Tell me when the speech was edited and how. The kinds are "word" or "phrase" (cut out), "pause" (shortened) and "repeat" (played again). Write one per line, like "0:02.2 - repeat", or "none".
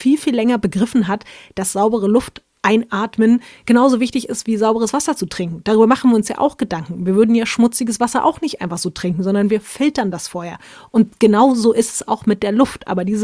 none